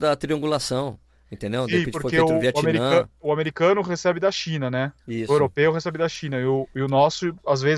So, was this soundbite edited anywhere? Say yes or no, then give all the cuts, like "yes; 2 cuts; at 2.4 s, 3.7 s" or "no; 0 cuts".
yes; 1 cut; at 5.0 s